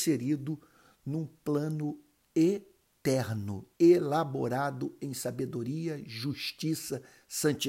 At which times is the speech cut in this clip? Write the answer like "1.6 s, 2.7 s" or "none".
3.7 s